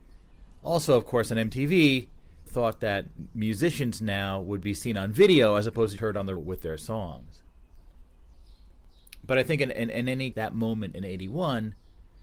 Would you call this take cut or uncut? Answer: cut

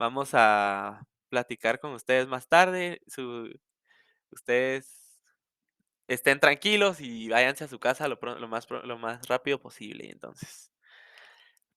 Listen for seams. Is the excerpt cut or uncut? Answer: uncut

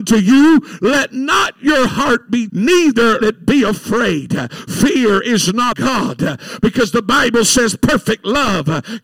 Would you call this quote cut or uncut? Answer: cut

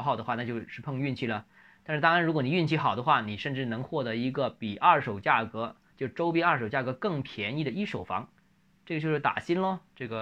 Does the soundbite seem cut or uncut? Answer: uncut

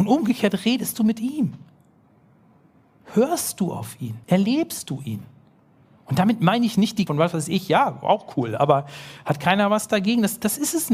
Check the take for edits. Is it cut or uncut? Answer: cut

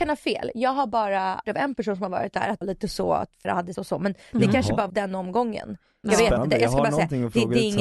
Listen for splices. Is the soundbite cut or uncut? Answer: cut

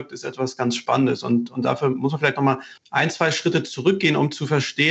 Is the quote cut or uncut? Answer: cut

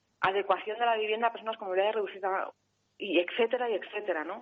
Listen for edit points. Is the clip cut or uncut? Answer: uncut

